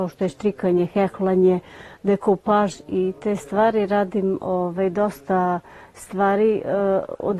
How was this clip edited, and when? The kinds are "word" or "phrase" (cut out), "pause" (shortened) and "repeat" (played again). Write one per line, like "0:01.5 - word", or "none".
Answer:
none